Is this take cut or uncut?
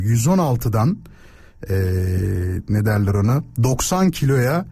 uncut